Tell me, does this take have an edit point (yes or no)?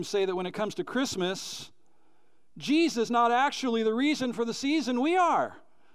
yes